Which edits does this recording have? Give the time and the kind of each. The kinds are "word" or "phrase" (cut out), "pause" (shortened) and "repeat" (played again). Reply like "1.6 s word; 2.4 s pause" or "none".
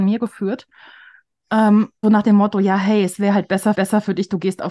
2.0 s word; 3.7 s repeat